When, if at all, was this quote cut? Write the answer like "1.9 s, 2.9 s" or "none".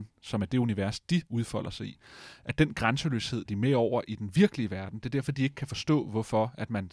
1.3 s, 3.5 s

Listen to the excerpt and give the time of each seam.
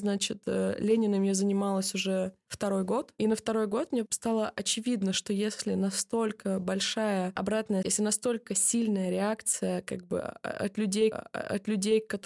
4.1 s, 7.8 s, 11.1 s

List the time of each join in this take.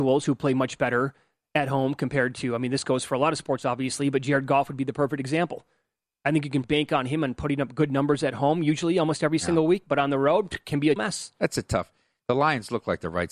6.6 s, 11.0 s

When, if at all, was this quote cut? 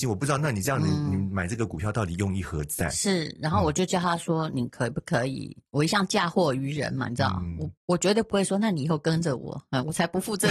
7.8 s

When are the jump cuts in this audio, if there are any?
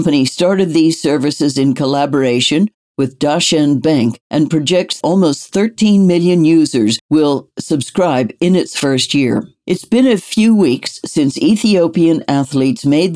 4.2 s, 5.0 s

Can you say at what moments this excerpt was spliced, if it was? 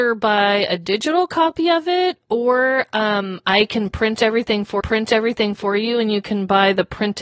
4.8 s

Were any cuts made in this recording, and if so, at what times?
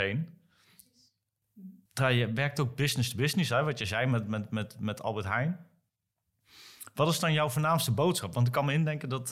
1.8 s

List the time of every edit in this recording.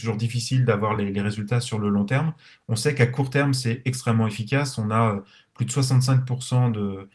none

